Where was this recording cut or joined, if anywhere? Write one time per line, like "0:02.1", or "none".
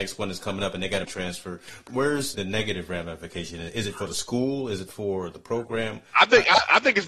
0:01.0
0:01.9
0:02.3